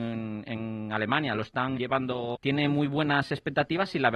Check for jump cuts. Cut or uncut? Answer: cut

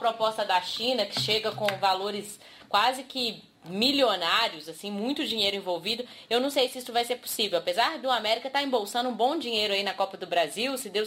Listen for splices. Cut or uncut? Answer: uncut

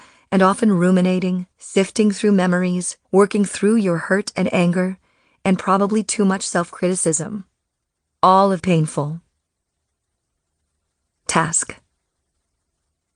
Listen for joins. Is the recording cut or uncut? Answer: cut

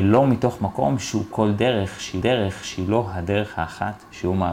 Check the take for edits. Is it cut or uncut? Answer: cut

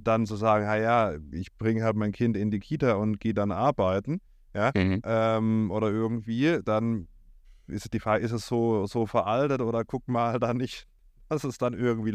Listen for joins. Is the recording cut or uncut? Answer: uncut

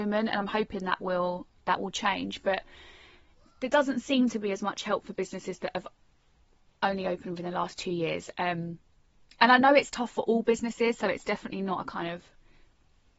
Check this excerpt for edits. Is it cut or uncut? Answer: uncut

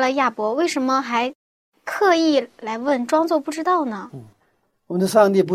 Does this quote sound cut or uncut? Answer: uncut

